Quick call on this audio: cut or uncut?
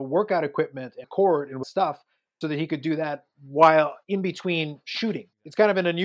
cut